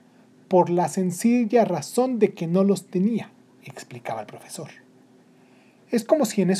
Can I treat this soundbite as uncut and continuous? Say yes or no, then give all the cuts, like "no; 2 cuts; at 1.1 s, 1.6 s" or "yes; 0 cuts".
yes; 0 cuts